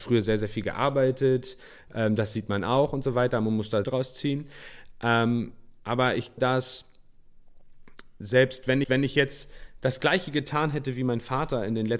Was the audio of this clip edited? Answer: yes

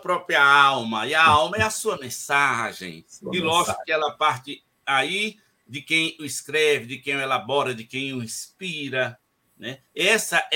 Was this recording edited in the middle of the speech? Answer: no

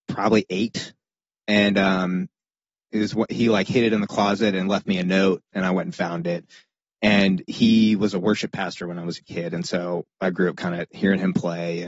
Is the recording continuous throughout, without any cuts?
yes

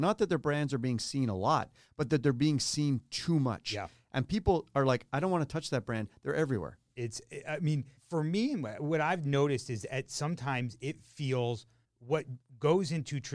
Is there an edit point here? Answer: yes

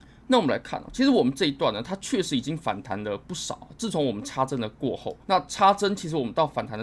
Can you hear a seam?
yes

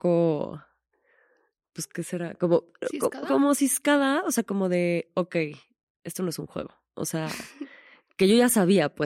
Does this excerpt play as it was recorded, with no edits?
yes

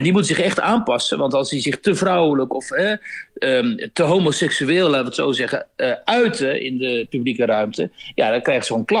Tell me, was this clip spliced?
no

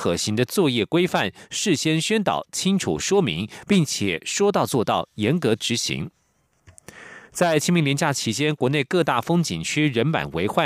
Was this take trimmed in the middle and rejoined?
yes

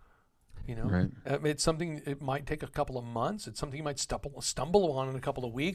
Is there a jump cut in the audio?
no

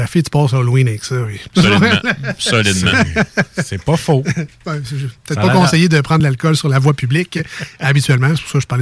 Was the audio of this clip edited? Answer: no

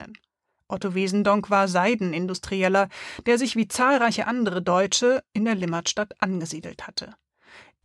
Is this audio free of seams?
yes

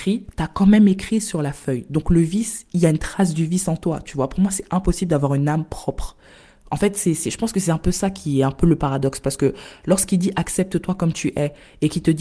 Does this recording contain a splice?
no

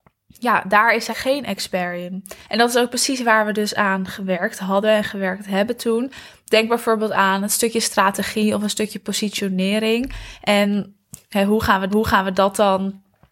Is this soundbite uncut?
no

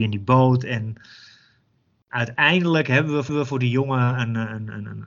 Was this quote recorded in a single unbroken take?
no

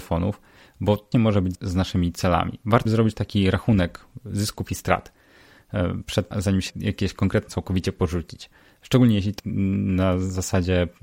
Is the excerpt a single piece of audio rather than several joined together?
no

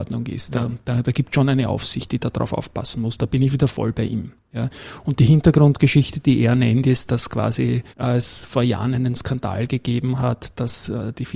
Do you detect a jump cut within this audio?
yes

